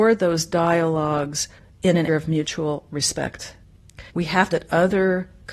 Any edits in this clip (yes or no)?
yes